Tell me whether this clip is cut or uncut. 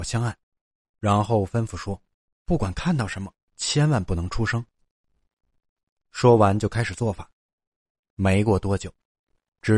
uncut